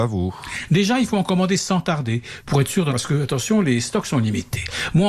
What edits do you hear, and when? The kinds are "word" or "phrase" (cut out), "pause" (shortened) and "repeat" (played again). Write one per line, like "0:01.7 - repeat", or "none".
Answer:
0:02.9 - word